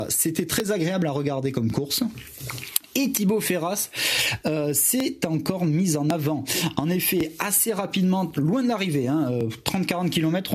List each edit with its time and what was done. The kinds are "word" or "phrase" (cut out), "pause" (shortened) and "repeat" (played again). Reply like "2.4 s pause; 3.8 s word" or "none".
none

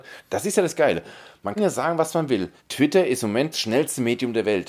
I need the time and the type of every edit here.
1.6 s word; 2.6 s pause; 3.5 s word

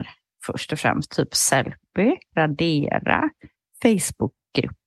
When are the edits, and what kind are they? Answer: 2.3 s word

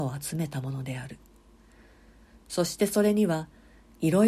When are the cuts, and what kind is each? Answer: none

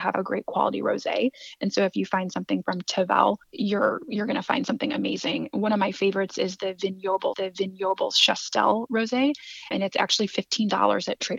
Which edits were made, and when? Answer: 3.4 s pause; 7.3 s repeat; 9.7 s word

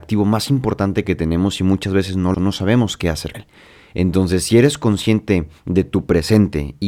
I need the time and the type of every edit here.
2.3 s phrase; 3.3 s word; 5.6 s pause

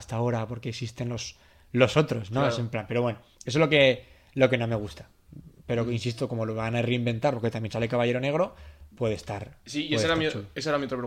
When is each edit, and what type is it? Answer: none

